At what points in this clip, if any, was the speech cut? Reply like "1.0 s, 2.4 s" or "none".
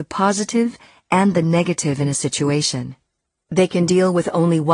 none